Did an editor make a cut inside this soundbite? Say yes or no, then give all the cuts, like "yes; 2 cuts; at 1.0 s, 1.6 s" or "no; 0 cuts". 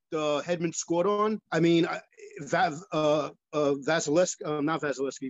yes; 1 cut; at 1.5 s